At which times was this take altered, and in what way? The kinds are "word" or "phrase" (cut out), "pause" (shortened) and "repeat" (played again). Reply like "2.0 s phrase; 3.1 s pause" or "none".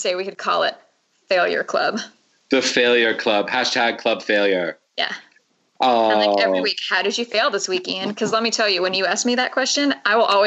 none